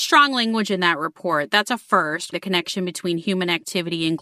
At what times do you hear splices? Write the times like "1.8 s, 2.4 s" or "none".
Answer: 2.3 s